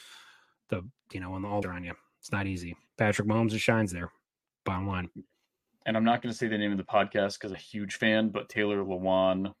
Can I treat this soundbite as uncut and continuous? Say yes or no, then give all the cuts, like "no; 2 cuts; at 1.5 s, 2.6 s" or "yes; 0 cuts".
no; 3 cuts; at 1.0 s, 1.6 s, 7.5 s